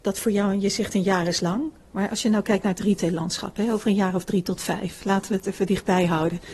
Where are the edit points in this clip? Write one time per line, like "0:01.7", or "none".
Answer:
none

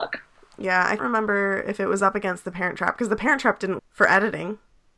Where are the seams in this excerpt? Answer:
0:01.0
0:02.4
0:03.8

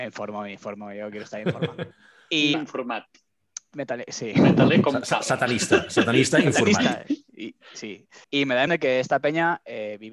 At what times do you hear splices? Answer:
0:01.9
0:02.5
0:08.2
0:08.7

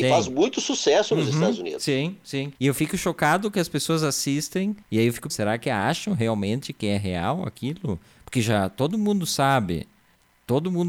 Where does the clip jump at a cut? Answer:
0:02.5
0:04.8
0:05.3

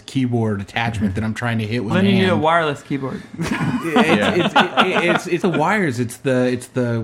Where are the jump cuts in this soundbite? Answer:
0:01.9
0:05.4

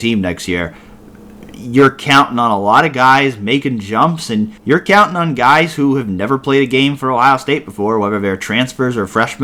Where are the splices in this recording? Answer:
0:04.6

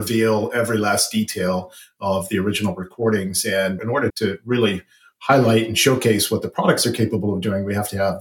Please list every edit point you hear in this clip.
0:03.8
0:04.1

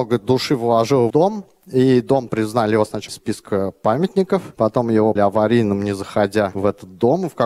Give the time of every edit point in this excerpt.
0:01.1
0:02.3
0:03.1
0:05.2

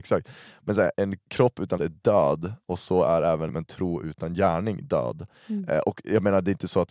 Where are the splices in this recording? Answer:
0:00.9
0:01.8
0:03.5

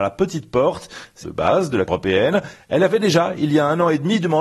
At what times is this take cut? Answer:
0:01.2
0:01.9

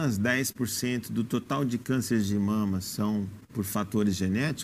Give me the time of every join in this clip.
0:03.4

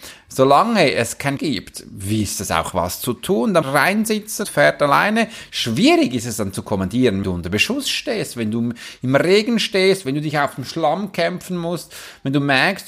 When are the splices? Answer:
0:01.4
0:02.7
0:03.6
0:04.4
0:07.2

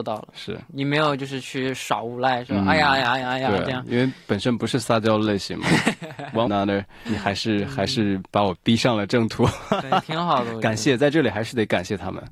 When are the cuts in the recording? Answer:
0:06.5
0:07.1

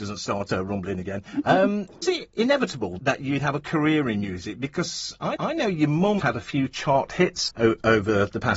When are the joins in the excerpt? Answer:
0:02.0
0:03.0
0:05.4
0:06.2
0:07.5

